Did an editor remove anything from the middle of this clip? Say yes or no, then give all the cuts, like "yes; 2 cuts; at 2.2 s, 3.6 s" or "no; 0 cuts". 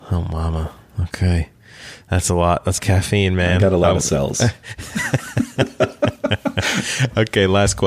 yes; 1 cut; at 2.8 s